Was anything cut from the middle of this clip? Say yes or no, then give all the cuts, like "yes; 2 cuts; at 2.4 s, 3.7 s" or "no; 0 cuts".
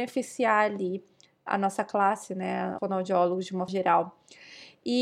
yes; 3 cuts; at 1.5 s, 2.8 s, 3.7 s